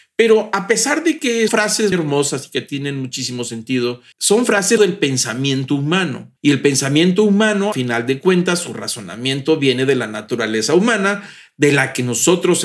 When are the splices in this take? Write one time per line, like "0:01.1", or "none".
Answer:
0:01.5
0:01.9
0:04.1
0:04.8
0:06.4
0:07.7